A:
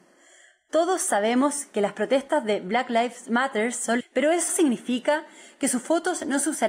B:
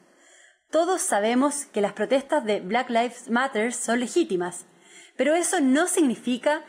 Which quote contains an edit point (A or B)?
A